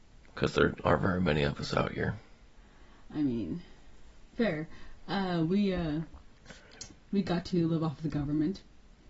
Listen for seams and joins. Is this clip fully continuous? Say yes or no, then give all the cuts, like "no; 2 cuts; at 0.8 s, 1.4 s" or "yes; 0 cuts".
yes; 0 cuts